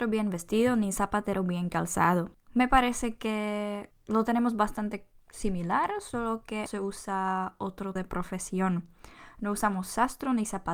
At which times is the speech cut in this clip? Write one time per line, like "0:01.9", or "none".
0:06.7
0:08.0